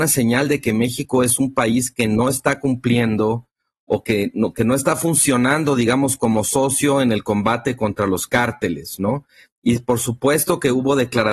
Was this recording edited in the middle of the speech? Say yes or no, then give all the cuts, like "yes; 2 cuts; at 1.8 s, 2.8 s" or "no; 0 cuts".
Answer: no; 0 cuts